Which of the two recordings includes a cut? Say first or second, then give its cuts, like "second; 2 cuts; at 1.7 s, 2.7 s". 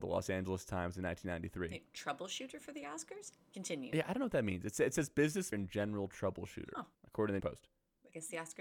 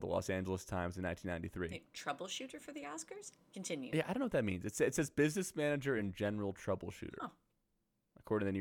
first; 3 cuts; at 5.5 s, 6.9 s, 7.4 s